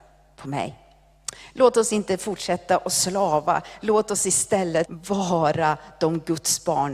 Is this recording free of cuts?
no; 1 cut; at 4.8 s

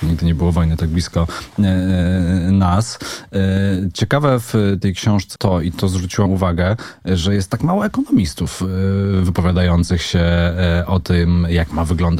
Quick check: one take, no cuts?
no; 2 cuts; at 5.4 s, 6.3 s

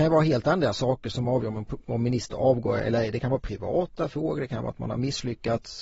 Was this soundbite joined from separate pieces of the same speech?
no; 0 cuts

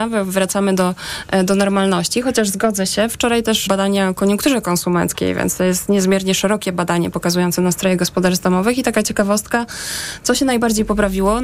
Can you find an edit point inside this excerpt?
yes; 1 cut; at 3.7 s

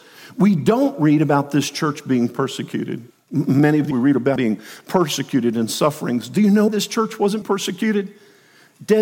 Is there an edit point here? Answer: yes; 5 cuts; at 3.1 s, 3.9 s, 4.4 s, 6.7 s, 7.4 s

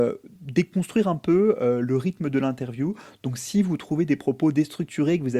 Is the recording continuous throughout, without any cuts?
yes; 0 cuts

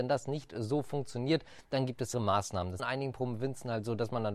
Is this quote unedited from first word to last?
no; 2 cuts; at 2.1 s, 2.8 s

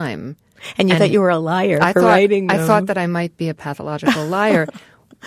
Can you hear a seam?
no; 0 cuts

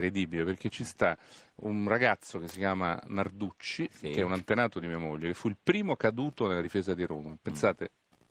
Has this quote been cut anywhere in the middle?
no; 0 cuts

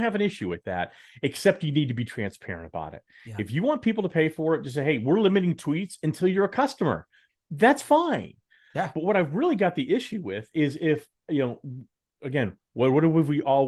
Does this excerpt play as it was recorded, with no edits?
yes; 0 cuts

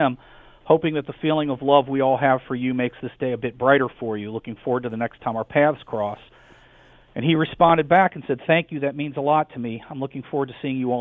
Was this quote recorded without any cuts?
yes; 0 cuts

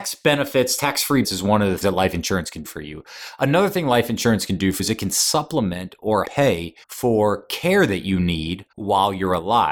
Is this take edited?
yes; 7 cuts; at 1.2 s, 1.8 s, 2.6 s, 4.8 s, 6.2 s, 6.8 s, 8.7 s

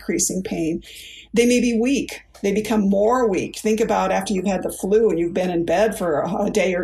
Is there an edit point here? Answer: no; 0 cuts

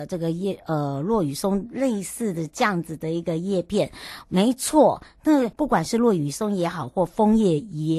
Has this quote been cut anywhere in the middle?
yes; 1 cut; at 5.5 s

